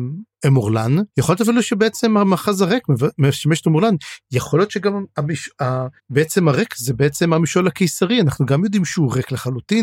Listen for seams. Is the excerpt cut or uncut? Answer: cut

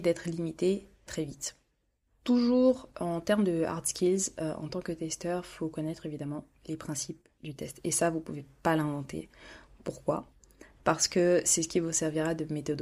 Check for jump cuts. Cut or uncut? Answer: cut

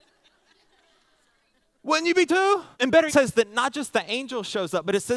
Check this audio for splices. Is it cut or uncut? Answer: cut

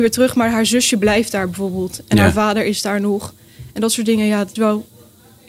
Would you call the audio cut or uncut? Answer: cut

